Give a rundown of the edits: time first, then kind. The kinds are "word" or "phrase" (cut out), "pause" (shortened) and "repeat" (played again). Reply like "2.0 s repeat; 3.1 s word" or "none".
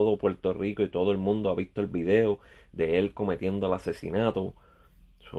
none